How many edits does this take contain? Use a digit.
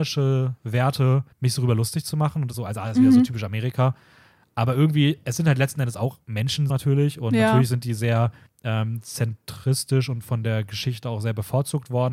4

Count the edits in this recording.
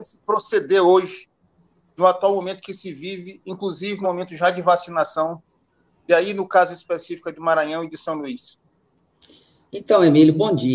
1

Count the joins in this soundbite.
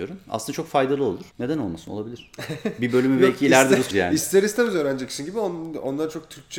2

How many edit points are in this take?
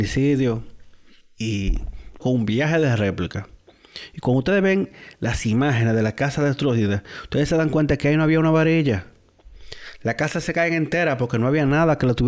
1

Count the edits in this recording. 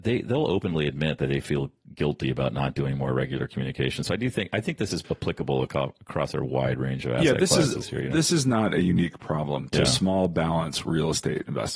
1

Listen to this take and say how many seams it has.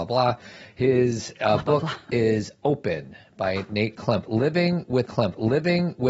1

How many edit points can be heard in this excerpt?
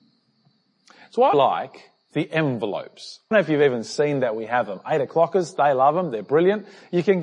2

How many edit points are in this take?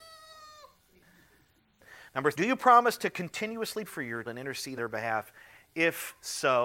4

